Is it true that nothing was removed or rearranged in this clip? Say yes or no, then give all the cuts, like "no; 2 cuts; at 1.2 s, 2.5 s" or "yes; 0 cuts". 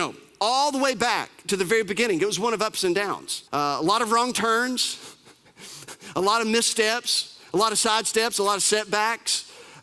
no; 1 cut; at 3.5 s